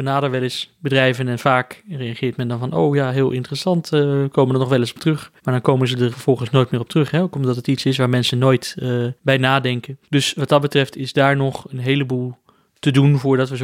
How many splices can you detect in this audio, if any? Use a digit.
4